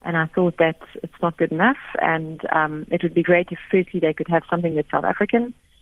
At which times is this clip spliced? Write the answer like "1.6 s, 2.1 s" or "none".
none